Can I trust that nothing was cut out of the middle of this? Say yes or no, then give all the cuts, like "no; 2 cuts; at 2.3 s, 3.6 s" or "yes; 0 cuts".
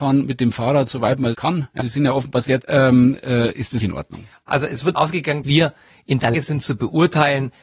no; 7 cuts; at 1.3 s, 1.8 s, 2.6 s, 3.8 s, 4.9 s, 5.4 s, 6.3 s